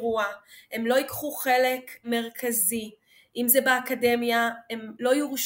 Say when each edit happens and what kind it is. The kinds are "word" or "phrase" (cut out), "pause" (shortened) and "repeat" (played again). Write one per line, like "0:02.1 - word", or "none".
none

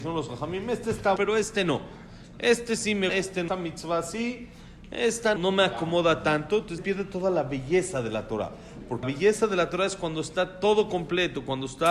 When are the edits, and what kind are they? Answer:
0:01.2 - word
0:03.1 - word
0:03.5 - word
0:05.4 - word
0:06.8 - word
0:09.0 - word

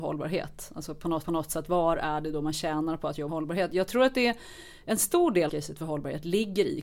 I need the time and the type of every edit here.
0:01.2 - repeat
0:03.3 - word
0:05.5 - phrase

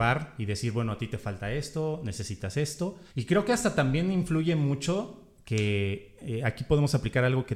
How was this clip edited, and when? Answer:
0:03.1 - pause

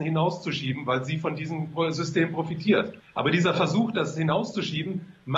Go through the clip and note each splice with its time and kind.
0:03.0 - pause

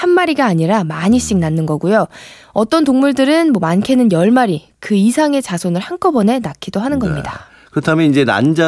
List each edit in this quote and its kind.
none

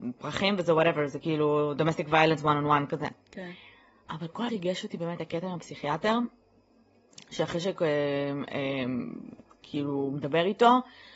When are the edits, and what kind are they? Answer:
0:04.5 - phrase

